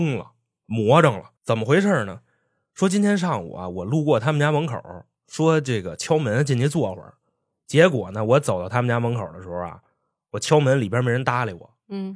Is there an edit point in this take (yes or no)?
yes